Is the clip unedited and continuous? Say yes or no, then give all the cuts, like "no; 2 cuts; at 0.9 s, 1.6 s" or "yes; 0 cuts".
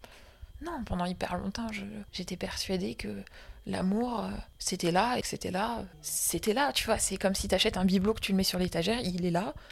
no; 2 cuts; at 2.1 s, 5.2 s